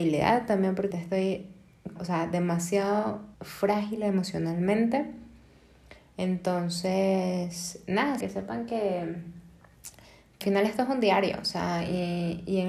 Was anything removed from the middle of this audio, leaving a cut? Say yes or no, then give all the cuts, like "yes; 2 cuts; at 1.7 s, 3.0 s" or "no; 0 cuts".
yes; 5 cuts; at 0.9 s, 2.0 s, 3.3 s, 8.2 s, 10.4 s